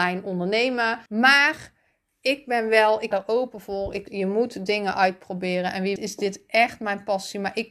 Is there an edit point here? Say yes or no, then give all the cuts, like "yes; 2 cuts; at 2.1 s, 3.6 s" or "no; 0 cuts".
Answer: yes; 4 cuts; at 1.1 s, 3.1 s, 4.1 s, 6.0 s